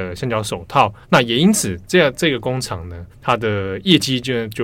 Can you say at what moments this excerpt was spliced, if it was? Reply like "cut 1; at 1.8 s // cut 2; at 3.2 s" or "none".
cut 1; at 1.0 s // cut 2; at 3.1 s